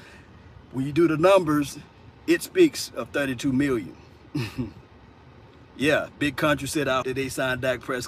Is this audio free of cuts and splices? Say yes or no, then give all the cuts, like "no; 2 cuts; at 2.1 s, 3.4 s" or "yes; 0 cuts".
no; 1 cut; at 7.0 s